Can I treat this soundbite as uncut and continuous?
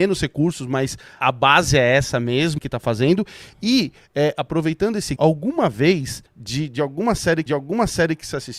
no; 5 cuts; at 1.2 s, 2.6 s, 5.2 s, 6.3 s, 7.5 s

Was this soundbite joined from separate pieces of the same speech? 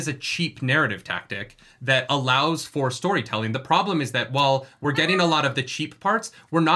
no; 0 cuts

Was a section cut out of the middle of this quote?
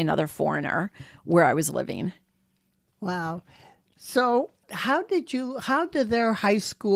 no; 0 cuts

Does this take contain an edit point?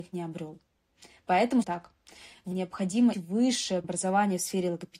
yes; 4 cuts; at 1.6 s, 2.5 s, 3.1 s, 3.8 s

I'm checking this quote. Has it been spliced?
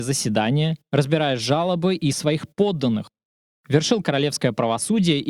yes; 1 cut; at 2.1 s

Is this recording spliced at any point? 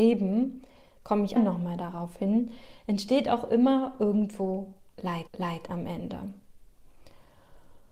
yes; 2 cuts; at 1.4 s, 5.3 s

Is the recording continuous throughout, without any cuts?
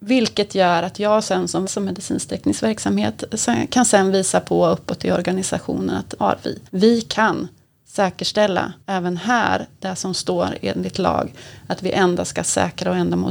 no; 4 cuts; at 1.6 s, 6.2 s, 6.7 s, 8.8 s

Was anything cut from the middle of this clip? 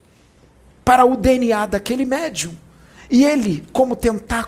no; 0 cuts

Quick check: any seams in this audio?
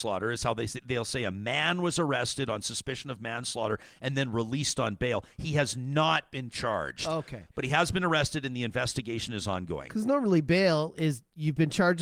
no; 0 cuts

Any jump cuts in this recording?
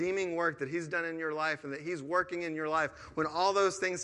no; 0 cuts

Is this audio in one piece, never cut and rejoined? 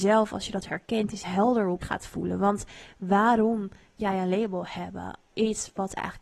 no; 4 cuts; at 1.2 s, 1.8 s, 4.0 s, 5.3 s

